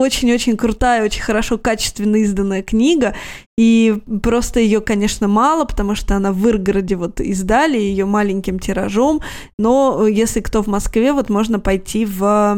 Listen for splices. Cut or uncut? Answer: uncut